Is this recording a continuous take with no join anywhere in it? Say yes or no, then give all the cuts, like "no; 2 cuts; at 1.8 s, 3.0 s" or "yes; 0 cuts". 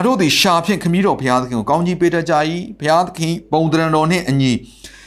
yes; 0 cuts